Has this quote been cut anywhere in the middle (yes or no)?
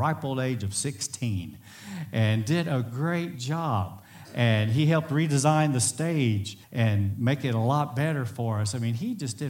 yes